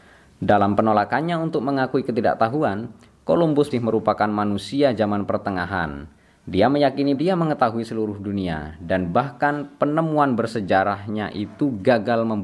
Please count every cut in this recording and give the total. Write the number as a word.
two